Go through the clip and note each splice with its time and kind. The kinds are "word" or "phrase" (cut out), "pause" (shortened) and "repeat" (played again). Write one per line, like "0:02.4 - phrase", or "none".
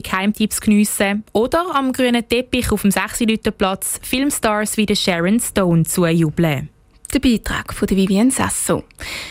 none